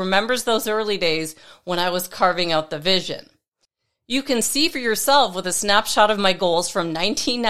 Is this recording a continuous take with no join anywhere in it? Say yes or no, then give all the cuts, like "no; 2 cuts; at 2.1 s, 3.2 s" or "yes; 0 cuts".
yes; 0 cuts